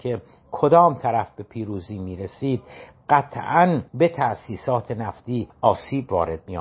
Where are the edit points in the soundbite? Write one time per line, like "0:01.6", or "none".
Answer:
0:03.9
0:05.5